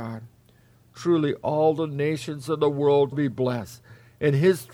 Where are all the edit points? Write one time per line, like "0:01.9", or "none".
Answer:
0:03.1